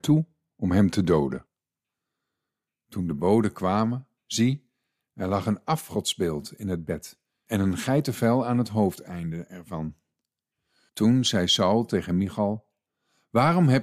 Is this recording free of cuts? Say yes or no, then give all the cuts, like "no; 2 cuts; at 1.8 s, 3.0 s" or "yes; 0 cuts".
yes; 0 cuts